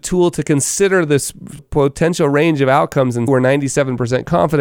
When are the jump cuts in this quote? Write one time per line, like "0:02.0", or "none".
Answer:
0:01.6
0:03.3